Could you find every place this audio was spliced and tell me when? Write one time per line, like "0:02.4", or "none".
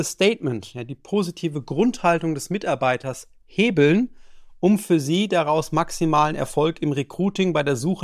none